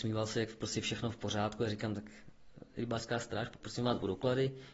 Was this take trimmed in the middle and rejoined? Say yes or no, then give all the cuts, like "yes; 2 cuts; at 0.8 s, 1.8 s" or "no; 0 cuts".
no; 0 cuts